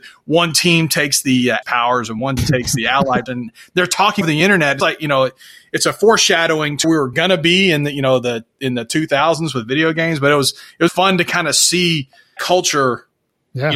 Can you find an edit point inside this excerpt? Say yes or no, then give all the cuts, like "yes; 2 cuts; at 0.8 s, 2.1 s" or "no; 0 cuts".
yes; 8 cuts; at 1.6 s, 2.4 s, 3.3 s, 4.2 s, 4.8 s, 6.8 s, 10.9 s, 12.4 s